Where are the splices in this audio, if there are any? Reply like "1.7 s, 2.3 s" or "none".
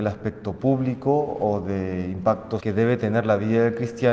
2.6 s